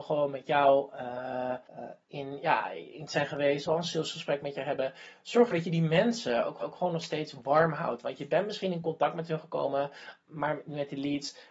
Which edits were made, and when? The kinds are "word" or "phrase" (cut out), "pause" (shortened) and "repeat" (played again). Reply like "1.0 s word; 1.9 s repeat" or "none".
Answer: 1.7 s pause; 3.1 s word; 3.7 s word; 5.5 s word; 6.6 s repeat; 10.2 s word